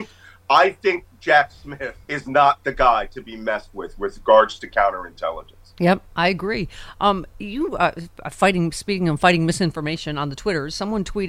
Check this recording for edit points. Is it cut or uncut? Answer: cut